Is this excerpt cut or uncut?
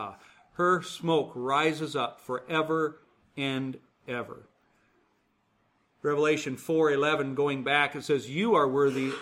uncut